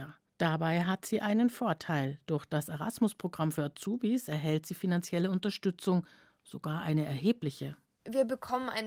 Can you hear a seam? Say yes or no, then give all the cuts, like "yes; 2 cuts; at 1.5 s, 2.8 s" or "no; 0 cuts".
no; 0 cuts